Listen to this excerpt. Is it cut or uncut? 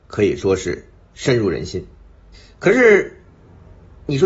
cut